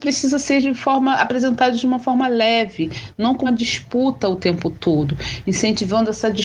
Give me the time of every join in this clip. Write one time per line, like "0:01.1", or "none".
0:03.5